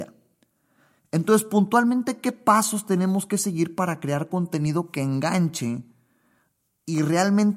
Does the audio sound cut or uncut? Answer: uncut